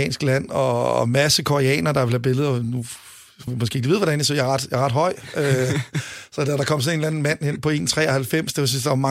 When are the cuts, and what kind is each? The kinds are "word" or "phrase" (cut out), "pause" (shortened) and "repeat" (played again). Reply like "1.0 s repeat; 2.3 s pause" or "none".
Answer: 3.5 s phrase